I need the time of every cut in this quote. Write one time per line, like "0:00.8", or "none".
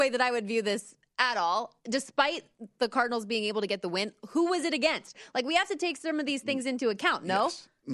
none